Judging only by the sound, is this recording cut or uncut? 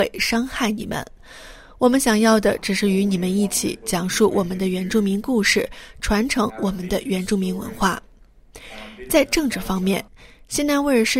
uncut